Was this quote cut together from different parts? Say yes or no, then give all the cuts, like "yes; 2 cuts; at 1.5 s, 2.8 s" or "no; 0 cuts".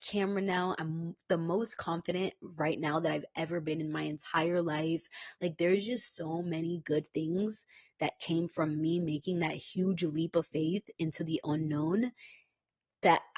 no; 0 cuts